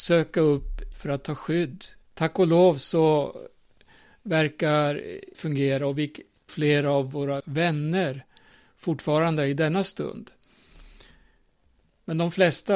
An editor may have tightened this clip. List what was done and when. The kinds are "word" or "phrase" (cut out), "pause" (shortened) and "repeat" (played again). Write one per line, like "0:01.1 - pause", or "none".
0:00.9 - word
0:02.0 - pause
0:05.3 - word
0:06.5 - phrase
0:07.4 - word